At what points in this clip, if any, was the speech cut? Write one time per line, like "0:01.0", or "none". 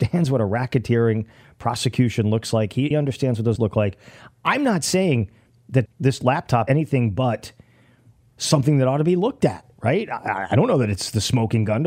0:02.9
0:03.6
0:05.9
0:06.7
0:08.3
0:10.1

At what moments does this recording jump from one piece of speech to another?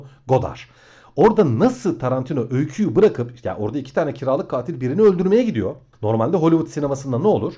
none

